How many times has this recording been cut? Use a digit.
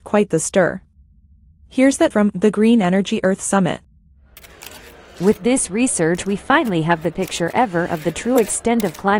2